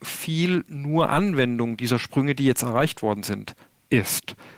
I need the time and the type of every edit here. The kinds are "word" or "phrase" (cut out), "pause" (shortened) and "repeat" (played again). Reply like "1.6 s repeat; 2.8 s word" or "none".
none